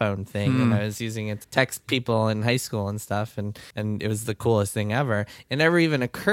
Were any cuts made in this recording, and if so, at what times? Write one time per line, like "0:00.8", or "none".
0:01.4
0:03.7